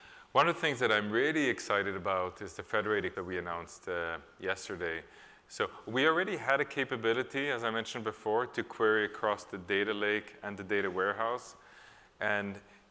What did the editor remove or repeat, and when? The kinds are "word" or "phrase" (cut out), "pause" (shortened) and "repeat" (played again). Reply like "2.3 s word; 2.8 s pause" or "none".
3.1 s phrase